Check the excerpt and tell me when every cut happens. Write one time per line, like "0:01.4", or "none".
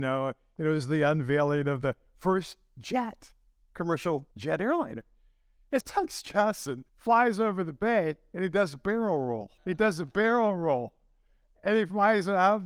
0:04.3
0:05.8
0:06.9
0:09.6